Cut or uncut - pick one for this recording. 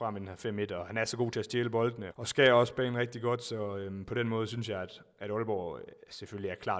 cut